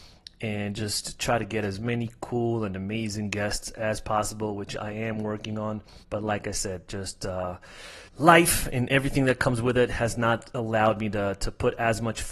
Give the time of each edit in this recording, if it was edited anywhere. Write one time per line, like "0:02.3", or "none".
0:06.0
0:08.1